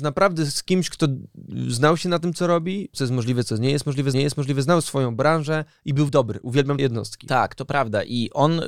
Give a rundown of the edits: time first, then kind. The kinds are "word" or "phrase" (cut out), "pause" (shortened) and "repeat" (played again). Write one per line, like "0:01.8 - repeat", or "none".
0:02.9 - word
0:04.1 - repeat
0:06.1 - word
0:06.8 - word